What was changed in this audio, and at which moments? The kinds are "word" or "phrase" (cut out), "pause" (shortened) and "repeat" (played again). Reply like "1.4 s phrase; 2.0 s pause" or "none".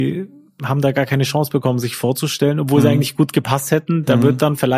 none